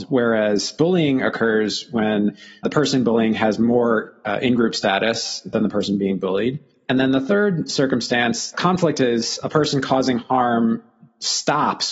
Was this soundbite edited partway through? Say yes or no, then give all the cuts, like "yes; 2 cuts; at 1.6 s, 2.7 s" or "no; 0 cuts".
yes; 1 cut; at 2.6 s